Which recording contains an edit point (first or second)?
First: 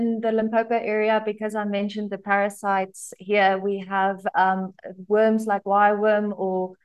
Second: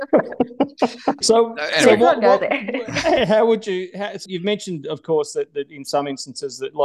second